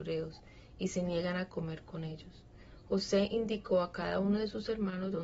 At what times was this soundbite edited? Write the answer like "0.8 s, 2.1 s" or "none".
none